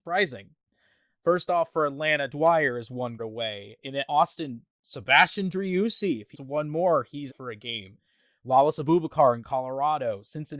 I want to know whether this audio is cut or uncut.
cut